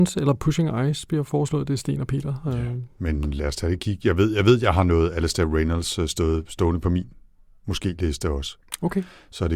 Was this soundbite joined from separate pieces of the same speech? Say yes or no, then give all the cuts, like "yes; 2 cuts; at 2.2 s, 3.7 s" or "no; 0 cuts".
no; 0 cuts